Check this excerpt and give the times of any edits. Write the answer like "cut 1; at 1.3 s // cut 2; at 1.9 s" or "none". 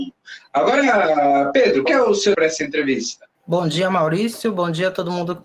cut 1; at 1.9 s // cut 2; at 2.3 s // cut 3; at 3.3 s